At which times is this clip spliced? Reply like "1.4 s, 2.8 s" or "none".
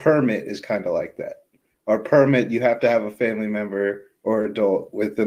none